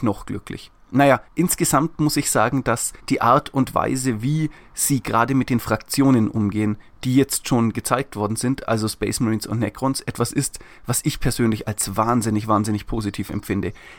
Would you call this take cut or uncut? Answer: cut